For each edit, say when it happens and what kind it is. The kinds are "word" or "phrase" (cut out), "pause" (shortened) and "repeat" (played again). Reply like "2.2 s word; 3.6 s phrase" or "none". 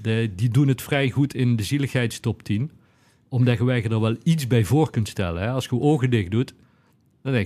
none